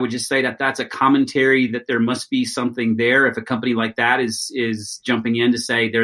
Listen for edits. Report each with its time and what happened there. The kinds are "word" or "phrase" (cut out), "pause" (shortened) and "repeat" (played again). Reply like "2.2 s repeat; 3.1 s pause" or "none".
none